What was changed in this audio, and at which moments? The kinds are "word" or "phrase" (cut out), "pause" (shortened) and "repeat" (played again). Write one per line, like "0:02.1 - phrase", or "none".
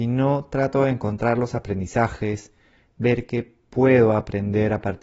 none